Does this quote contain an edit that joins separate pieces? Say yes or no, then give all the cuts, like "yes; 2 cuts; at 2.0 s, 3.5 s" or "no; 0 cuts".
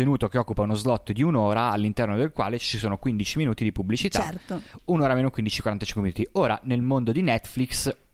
no; 0 cuts